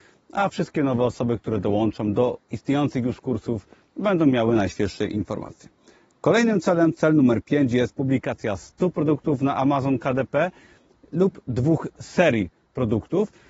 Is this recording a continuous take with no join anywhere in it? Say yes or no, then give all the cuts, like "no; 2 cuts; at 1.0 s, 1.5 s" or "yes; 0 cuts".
yes; 0 cuts